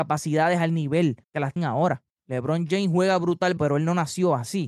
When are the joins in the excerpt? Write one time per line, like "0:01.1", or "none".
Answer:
0:01.2
0:01.6
0:02.1
0:03.6